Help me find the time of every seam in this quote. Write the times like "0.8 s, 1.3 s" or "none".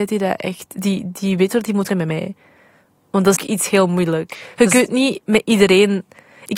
1.9 s, 3.4 s